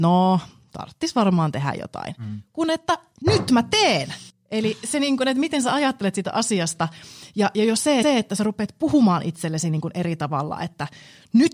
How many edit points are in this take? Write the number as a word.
two